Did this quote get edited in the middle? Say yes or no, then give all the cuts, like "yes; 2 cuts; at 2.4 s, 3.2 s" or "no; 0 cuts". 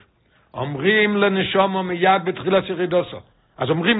no; 0 cuts